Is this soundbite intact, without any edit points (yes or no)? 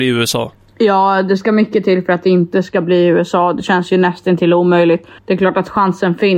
no